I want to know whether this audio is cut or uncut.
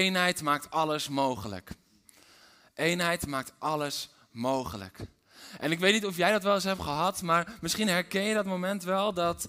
uncut